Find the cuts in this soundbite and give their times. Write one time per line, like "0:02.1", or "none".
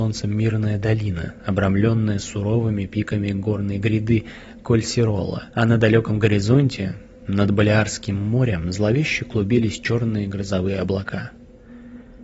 0:05.5